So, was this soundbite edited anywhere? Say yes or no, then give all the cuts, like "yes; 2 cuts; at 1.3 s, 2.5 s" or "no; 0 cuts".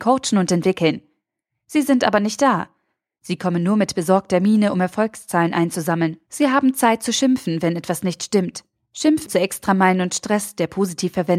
yes; 1 cut; at 9.3 s